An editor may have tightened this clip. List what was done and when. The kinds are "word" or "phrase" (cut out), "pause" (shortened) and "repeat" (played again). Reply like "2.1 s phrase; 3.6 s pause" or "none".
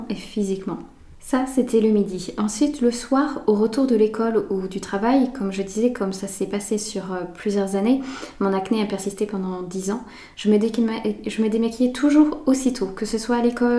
none

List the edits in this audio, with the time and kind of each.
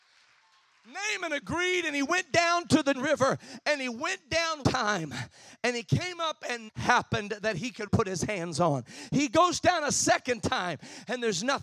2.9 s word; 4.6 s word; 6.7 s word; 7.9 s word

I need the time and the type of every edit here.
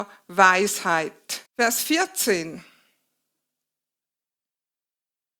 1.5 s pause

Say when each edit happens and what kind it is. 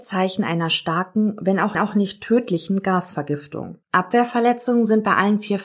1.7 s repeat; 3.8 s pause

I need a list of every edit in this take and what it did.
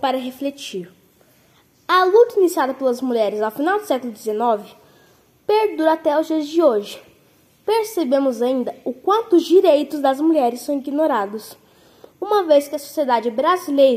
none

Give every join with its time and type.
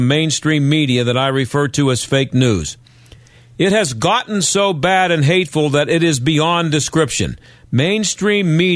none

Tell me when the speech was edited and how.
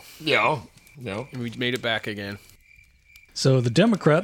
1.5 s word

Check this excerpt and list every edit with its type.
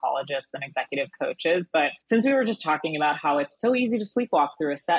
2.0 s pause

